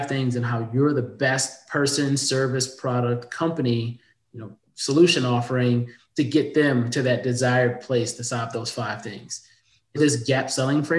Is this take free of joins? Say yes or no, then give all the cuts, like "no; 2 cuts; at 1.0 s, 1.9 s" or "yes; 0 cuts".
no; 1 cut; at 10.0 s